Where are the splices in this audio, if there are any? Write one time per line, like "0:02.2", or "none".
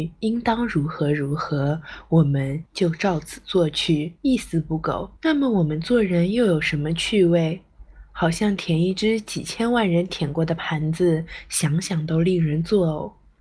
0:02.7
0:04.2
0:05.2